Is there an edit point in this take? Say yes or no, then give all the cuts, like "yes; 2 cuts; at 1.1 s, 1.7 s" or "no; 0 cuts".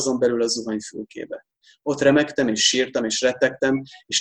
no; 0 cuts